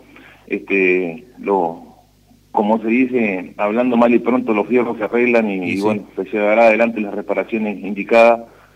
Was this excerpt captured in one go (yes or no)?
yes